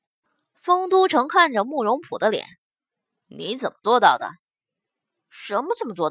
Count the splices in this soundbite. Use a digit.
0